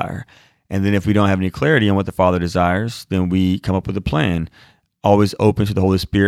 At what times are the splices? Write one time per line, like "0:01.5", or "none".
none

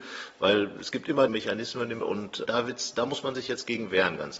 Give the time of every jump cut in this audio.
0:01.3
0:02.0
0:02.4

